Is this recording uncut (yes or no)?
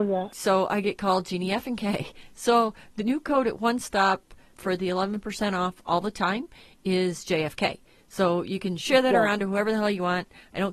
no